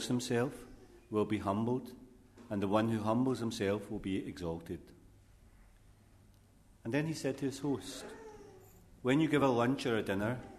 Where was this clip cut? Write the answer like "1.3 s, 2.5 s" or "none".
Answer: none

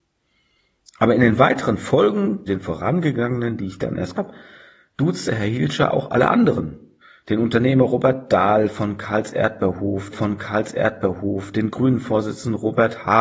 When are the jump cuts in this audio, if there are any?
2.5 s, 4.1 s, 7.0 s, 10.1 s

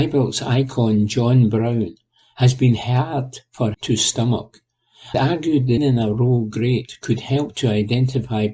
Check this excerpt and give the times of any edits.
3.7 s, 5.1 s, 5.8 s

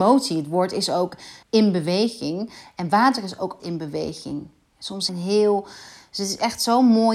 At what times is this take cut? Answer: 1.4 s, 3.6 s, 5.1 s

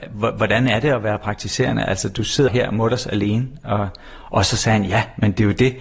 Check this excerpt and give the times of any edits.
2.5 s

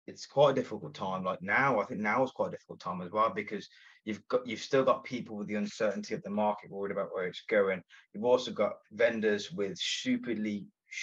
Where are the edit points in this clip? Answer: none

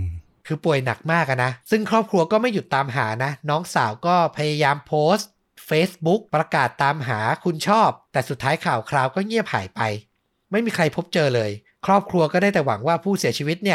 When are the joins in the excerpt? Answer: 1.6 s, 6.3 s, 8.0 s, 11.7 s

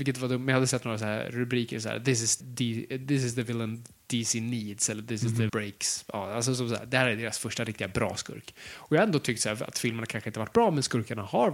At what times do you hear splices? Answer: 2.4 s, 5.5 s

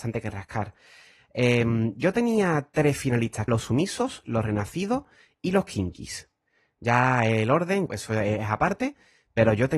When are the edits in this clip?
3.5 s, 7.9 s

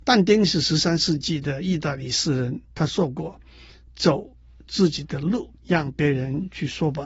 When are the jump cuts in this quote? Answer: 2.6 s, 5.6 s

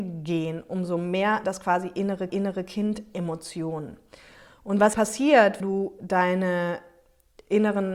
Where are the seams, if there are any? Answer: 1.4 s, 2.3 s, 4.9 s, 5.6 s

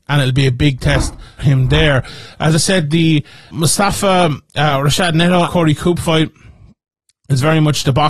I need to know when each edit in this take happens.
1.4 s, 3.5 s, 5.4 s

